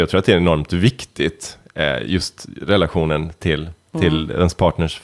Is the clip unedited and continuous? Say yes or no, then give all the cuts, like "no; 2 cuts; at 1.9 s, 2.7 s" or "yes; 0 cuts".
yes; 0 cuts